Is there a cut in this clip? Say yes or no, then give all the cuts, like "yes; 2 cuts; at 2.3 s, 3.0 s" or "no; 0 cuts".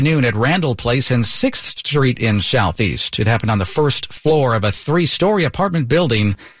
no; 0 cuts